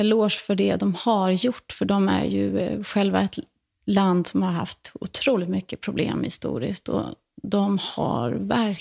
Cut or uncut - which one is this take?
uncut